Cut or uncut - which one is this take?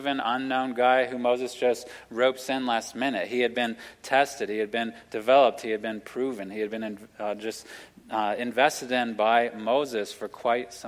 uncut